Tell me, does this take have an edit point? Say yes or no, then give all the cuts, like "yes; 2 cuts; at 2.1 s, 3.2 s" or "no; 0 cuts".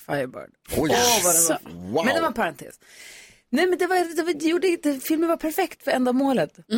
no; 0 cuts